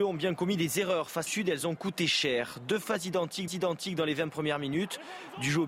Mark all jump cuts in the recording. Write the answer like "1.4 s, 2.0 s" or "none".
1.3 s, 3.5 s